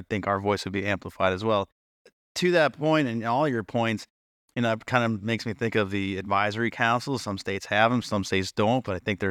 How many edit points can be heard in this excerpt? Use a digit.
0